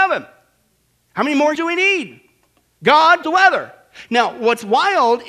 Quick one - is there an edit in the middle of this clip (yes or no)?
yes